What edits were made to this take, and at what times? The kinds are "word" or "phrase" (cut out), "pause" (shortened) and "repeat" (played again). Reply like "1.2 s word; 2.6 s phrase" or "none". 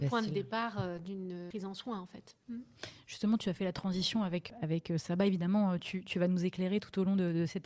none